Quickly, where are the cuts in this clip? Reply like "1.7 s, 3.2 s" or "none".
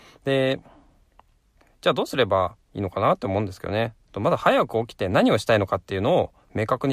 2.6 s, 4.0 s